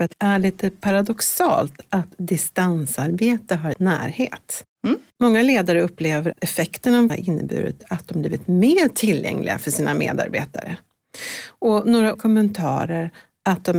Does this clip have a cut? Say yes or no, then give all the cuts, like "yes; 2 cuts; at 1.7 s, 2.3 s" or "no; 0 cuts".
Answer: yes; 4 cuts; at 3.7 s, 6.3 s, 7.1 s, 12.1 s